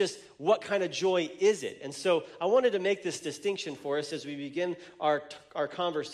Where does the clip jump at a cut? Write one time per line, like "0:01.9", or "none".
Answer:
none